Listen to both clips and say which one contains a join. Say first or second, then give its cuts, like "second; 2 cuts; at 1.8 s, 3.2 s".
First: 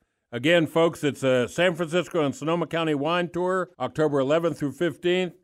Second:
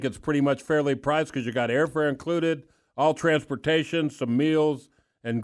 first; 1 cut; at 3.7 s